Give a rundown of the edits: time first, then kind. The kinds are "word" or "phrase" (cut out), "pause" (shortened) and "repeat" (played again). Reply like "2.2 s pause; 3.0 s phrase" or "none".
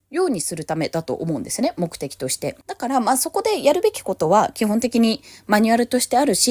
2.6 s pause